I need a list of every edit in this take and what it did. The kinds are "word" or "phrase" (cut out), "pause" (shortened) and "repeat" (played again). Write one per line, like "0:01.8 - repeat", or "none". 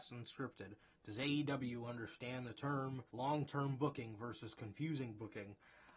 0:03.1 - pause